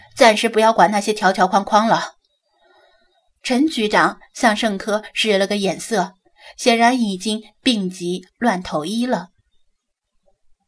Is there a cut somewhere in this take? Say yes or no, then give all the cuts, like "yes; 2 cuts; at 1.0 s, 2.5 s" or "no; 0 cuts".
no; 0 cuts